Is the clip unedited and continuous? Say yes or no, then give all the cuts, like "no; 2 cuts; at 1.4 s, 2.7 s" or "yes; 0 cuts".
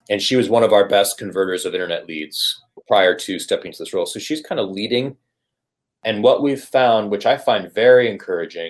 no; 1 cut; at 2.8 s